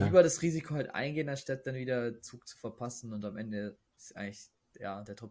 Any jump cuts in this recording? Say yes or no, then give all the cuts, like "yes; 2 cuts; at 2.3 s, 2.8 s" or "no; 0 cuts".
yes; 1 cut; at 3.9 s